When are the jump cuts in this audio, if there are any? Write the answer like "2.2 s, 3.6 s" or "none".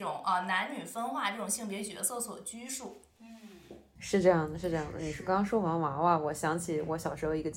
none